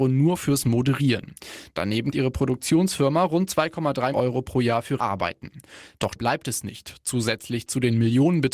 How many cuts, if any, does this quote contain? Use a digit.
4